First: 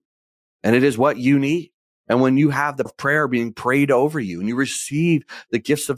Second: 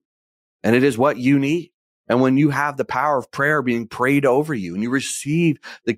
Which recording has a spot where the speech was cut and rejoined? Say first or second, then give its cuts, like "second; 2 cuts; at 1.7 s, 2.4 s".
first; 1 cut; at 2.9 s